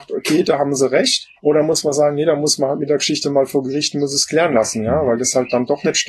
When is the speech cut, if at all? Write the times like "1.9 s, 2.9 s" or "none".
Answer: 1.4 s